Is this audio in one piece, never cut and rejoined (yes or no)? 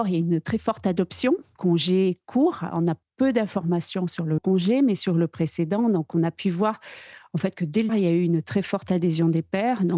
no